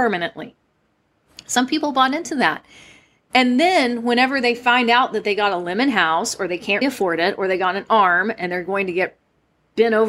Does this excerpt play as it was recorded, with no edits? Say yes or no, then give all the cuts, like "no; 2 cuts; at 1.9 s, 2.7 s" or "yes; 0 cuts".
no; 1 cut; at 6.8 s